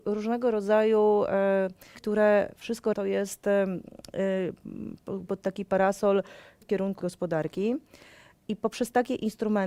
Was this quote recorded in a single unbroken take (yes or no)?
no